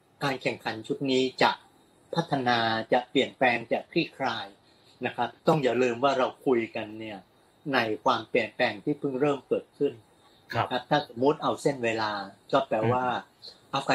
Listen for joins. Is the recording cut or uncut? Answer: cut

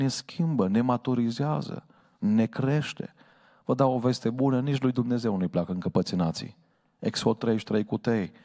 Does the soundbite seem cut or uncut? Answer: uncut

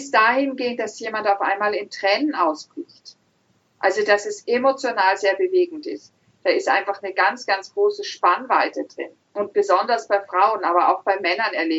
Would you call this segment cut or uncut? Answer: uncut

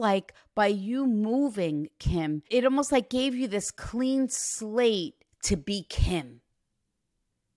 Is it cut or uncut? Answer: cut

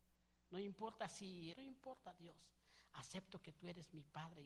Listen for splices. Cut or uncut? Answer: cut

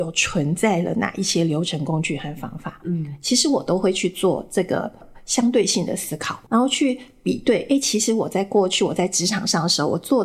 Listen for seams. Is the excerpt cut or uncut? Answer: cut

